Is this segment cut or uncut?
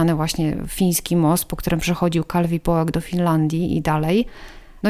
uncut